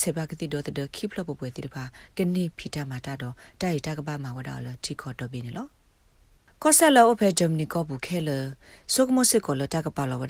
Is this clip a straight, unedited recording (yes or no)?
yes